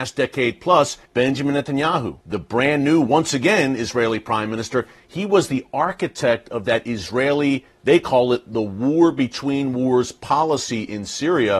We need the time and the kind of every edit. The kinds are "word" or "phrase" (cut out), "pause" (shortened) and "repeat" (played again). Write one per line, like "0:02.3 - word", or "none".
0:01.1 - pause
0:02.2 - pause